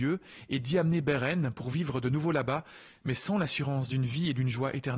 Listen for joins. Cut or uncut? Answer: uncut